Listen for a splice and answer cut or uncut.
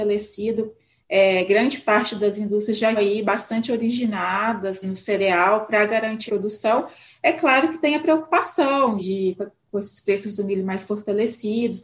cut